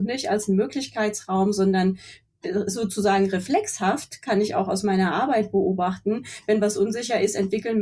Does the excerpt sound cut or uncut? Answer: uncut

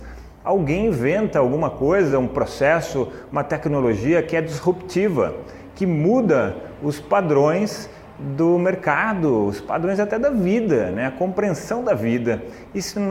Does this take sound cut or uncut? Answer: uncut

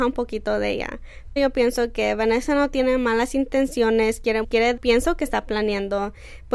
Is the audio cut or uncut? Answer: cut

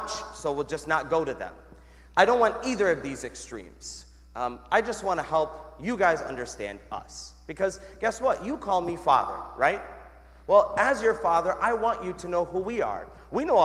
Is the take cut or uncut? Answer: uncut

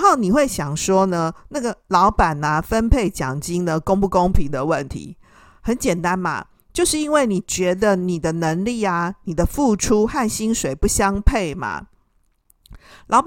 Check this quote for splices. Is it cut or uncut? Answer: uncut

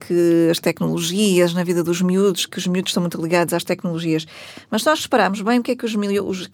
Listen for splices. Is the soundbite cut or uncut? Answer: uncut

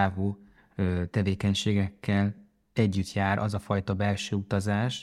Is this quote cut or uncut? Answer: uncut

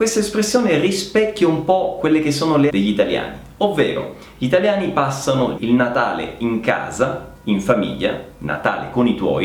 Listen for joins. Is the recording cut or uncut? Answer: cut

